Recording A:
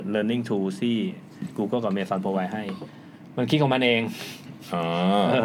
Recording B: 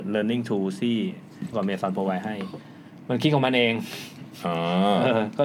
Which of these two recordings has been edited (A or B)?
B